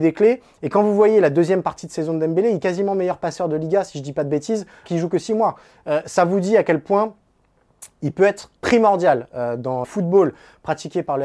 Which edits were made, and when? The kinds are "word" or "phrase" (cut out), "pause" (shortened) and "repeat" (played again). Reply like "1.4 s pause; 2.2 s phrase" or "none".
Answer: 2.6 s word; 4.9 s word; 8.6 s pause; 9.8 s word